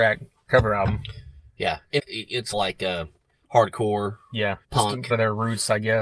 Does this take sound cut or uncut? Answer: cut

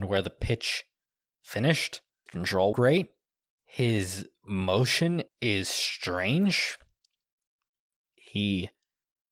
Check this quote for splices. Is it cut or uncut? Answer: cut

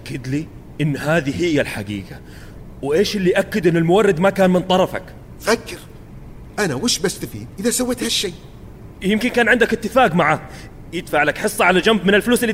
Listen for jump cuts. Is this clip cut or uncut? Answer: cut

